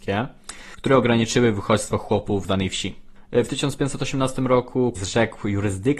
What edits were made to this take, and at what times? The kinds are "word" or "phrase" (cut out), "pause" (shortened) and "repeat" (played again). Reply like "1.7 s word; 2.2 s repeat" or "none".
2.4 s phrase; 5.0 s phrase